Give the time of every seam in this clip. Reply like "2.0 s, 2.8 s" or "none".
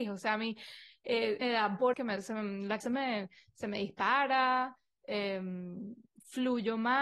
1.4 s, 1.9 s, 2.8 s